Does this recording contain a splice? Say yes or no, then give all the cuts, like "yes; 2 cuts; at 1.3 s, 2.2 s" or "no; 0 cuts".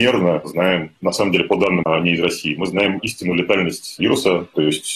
yes; 1 cut; at 1.8 s